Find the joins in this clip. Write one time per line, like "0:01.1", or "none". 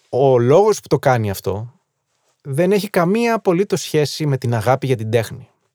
none